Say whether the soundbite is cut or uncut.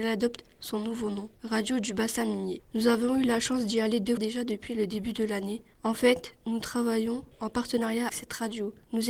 cut